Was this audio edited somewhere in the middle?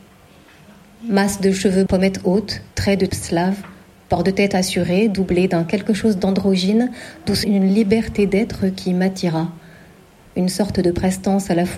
yes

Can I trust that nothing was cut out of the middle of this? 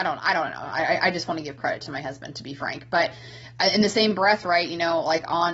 yes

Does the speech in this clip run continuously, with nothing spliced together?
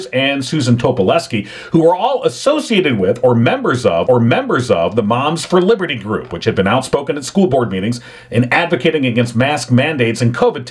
no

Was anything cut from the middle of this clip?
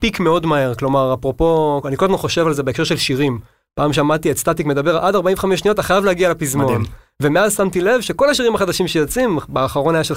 no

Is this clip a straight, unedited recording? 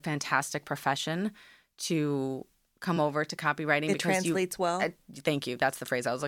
yes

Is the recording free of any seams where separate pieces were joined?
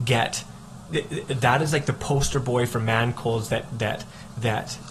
yes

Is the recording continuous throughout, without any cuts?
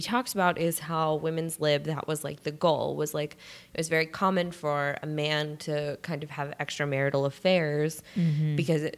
yes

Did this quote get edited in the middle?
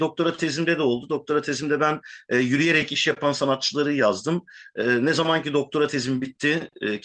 no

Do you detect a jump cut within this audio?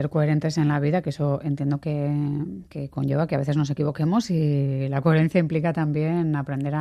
no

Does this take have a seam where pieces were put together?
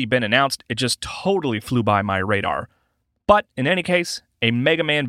no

